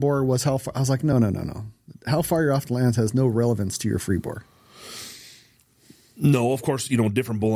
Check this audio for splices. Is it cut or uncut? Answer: uncut